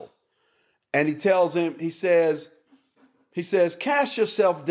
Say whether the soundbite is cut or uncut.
uncut